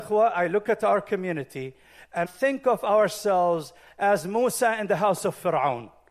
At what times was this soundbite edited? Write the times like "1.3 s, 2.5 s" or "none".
2.3 s